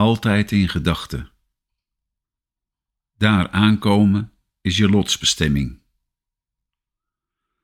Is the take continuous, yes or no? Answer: yes